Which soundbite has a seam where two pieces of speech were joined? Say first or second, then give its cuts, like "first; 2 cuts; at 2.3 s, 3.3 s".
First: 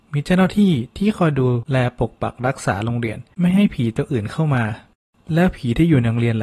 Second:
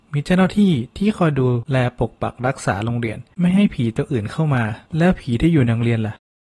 second; 1 cut; at 4.9 s